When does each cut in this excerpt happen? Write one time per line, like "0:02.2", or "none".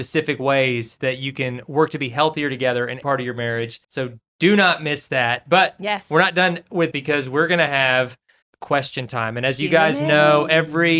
0:03.0
0:03.8
0:06.9
0:08.4